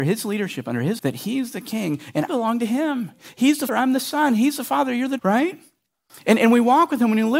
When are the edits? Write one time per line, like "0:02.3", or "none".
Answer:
0:01.0
0:02.3
0:03.7
0:05.2

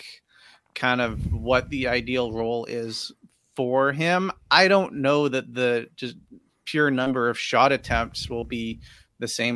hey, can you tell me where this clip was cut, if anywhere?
none

